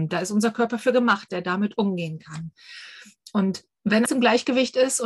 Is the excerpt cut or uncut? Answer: cut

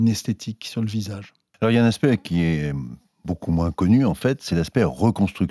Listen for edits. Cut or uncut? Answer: uncut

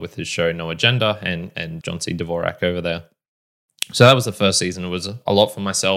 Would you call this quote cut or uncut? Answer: cut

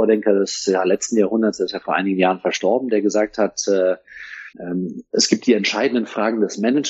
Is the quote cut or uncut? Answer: cut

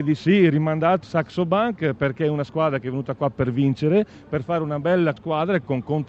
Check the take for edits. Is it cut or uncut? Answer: cut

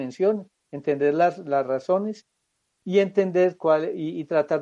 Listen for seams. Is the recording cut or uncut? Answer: uncut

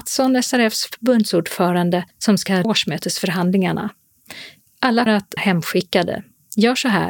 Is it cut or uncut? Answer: cut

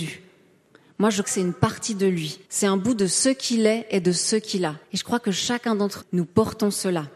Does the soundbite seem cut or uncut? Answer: cut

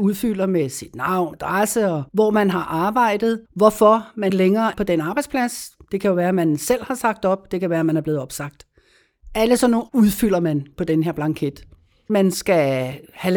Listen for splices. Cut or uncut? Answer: cut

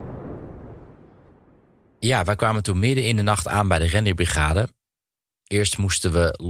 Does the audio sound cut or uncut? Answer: uncut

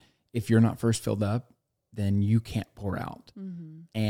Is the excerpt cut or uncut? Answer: uncut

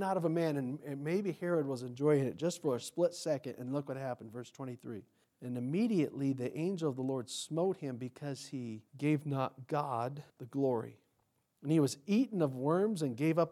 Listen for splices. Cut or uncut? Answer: cut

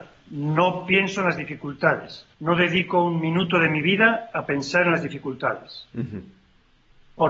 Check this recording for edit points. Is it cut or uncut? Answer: cut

